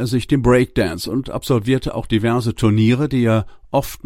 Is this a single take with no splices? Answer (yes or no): yes